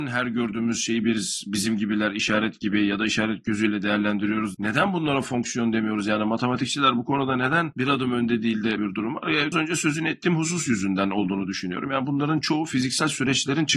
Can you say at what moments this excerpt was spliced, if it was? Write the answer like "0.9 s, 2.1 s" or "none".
4.5 s, 8.8 s, 9.5 s